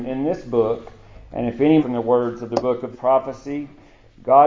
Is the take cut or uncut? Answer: cut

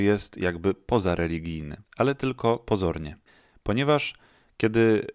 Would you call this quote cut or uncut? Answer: cut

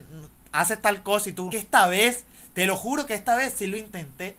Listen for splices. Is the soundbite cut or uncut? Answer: cut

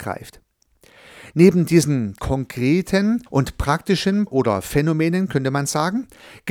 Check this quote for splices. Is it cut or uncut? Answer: cut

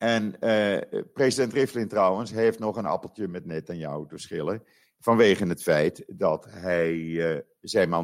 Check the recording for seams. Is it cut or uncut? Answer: uncut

